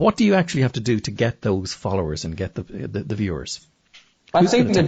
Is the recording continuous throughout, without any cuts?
yes; 0 cuts

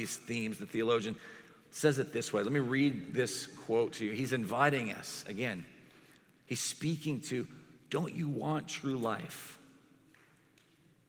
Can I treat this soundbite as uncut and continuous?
yes; 0 cuts

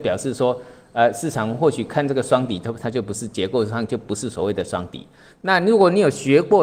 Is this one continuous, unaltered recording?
yes; 0 cuts

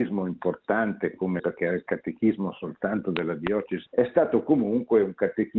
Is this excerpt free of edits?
no; 2 cuts; at 1.4 s, 3.9 s

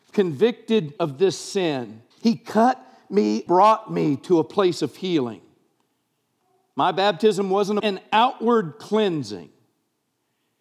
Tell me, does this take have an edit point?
yes; 4 cuts; at 1.0 s, 2.1 s, 3.5 s, 7.8 s

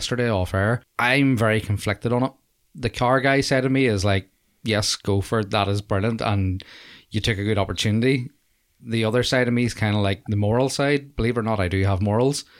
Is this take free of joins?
yes; 0 cuts

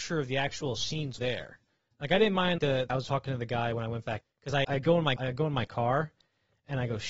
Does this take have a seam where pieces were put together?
yes; 6 cuts; at 1.2 s, 2.6 s, 2.9 s, 4.2 s, 4.6 s, 5.2 s

